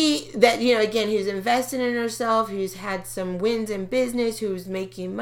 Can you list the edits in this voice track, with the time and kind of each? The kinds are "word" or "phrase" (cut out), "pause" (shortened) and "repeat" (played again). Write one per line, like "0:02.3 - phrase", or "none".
none